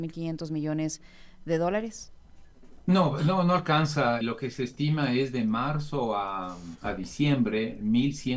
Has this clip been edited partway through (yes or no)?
yes